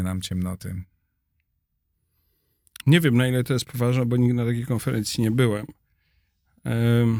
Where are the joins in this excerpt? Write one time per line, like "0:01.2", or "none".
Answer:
none

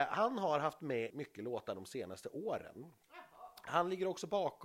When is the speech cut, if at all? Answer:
0:01.1

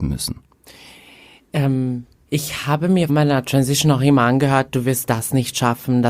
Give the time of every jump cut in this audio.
0:03.1

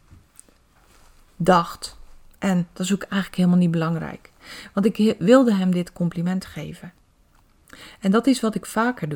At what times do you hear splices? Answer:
none

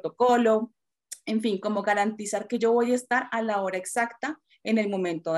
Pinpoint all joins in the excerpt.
none

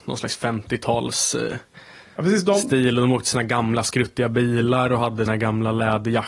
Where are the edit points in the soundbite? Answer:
0:05.3

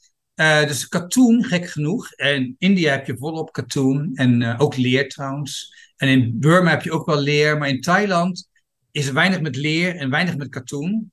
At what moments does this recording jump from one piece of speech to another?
none

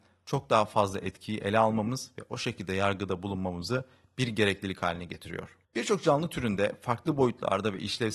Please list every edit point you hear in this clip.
0:05.6

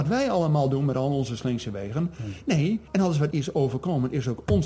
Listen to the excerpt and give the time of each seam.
0:02.9
0:03.3

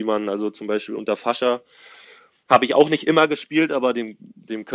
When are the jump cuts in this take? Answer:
none

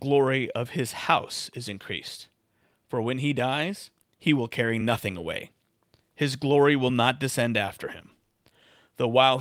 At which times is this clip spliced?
none

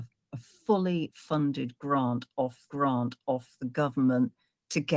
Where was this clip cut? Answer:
0:02.7

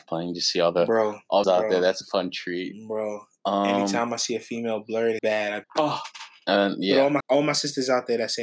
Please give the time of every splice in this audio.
0:01.4
0:02.0
0:05.2
0:05.6
0:07.2

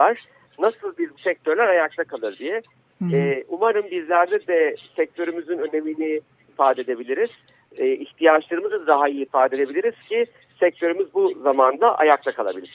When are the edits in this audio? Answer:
0:01.1
0:06.5

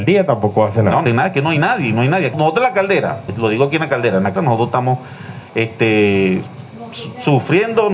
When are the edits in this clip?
0:01.1
0:02.3
0:03.3
0:04.4

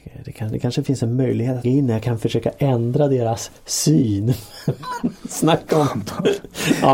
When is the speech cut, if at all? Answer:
0:01.6

